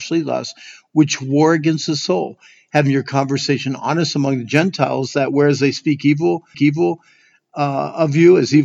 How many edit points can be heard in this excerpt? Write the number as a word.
one